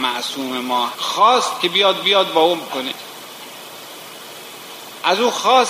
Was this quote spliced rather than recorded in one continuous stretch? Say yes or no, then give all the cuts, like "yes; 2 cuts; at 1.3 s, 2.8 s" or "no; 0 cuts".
yes; 3 cuts; at 0.9 s, 2.0 s, 2.7 s